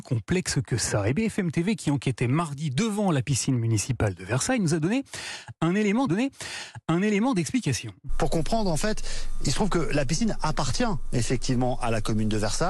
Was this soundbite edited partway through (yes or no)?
yes